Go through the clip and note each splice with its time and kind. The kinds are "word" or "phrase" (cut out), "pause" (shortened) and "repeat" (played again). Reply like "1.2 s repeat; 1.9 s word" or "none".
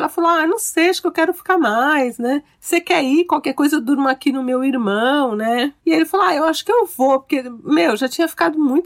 5.8 s pause